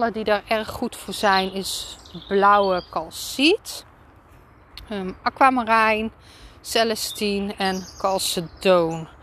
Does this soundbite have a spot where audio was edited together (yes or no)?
no